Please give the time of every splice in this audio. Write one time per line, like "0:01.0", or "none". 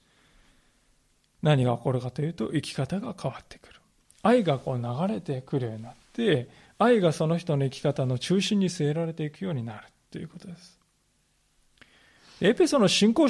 none